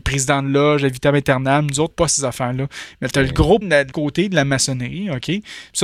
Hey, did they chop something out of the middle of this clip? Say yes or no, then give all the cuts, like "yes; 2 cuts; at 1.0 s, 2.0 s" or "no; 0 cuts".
yes; 3 cuts; at 1.9 s, 3.6 s, 3.9 s